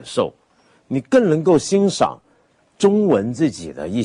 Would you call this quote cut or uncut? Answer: uncut